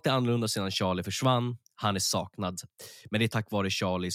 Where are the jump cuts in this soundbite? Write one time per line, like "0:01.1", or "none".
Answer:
none

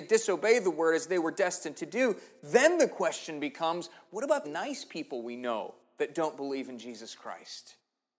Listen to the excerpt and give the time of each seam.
0:04.4

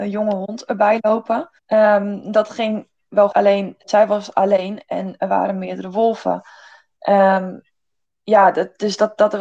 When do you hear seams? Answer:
0:01.6
0:03.3

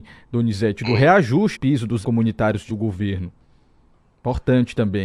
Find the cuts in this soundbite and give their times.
0:01.5
0:02.0
0:02.7

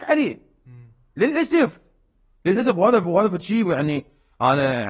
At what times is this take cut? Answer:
none

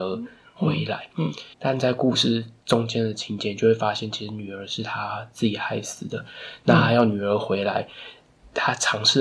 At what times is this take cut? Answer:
0:01.5

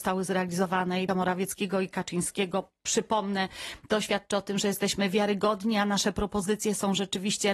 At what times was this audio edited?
0:01.1

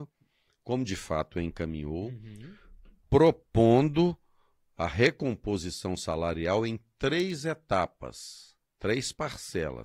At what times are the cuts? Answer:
none

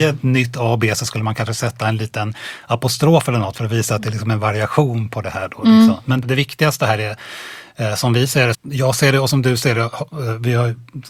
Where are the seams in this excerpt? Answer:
0:06.2
0:08.5

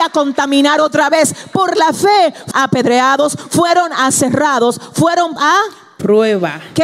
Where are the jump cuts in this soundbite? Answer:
0:02.5
0:05.4

